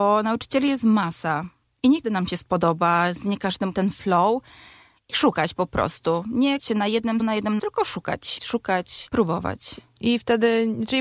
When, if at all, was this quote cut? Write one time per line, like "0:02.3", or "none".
0:02.0
0:03.7
0:06.6
0:07.2
0:07.6
0:08.4